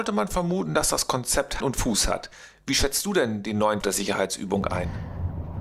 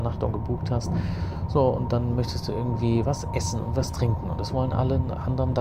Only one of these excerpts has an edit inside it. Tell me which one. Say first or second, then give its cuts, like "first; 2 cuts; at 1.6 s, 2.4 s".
first; 2 cuts; at 1.6 s, 3.8 s